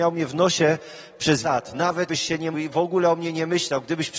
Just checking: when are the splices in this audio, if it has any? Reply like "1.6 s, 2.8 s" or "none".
1.4 s, 2.1 s, 2.5 s